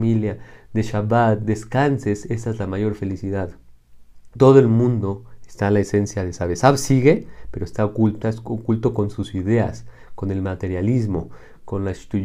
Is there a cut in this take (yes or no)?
yes